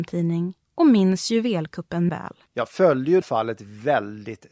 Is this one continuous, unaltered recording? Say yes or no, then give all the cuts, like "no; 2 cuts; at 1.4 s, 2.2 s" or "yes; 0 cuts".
no; 3 cuts; at 2.1 s, 2.5 s, 3.2 s